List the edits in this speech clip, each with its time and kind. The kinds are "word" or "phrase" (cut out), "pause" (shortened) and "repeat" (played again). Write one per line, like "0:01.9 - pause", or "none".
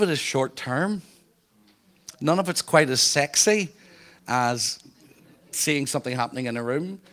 none